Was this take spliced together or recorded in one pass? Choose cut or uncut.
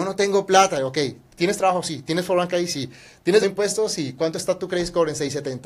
cut